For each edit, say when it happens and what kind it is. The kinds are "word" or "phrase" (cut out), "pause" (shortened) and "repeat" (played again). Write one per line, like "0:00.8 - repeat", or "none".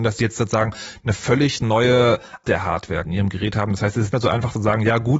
0:02.4 - word
0:03.0 - word
0:04.1 - word